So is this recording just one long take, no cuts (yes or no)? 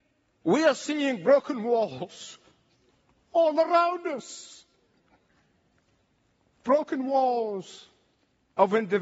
yes